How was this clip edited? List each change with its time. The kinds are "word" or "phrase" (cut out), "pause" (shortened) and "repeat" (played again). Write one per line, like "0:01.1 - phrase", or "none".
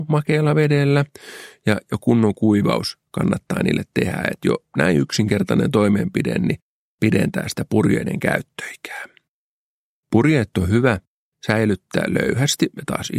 none